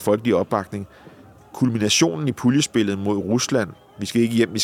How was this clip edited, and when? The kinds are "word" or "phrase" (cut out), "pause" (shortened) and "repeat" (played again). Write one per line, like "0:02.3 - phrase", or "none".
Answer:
none